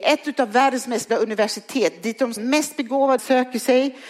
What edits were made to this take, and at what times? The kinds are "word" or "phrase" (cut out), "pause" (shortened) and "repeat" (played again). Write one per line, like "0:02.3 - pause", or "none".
0:01.1 - word
0:02.4 - word
0:03.2 - word